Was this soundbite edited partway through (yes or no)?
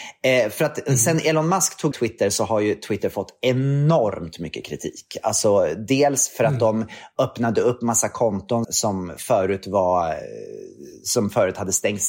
yes